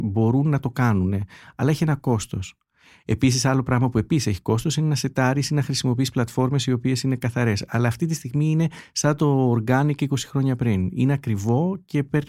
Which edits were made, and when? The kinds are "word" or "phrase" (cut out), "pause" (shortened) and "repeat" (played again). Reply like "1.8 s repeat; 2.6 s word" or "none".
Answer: none